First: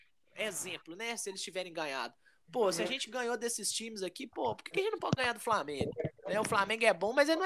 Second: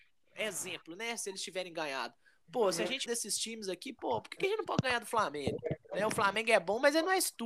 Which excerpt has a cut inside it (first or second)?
second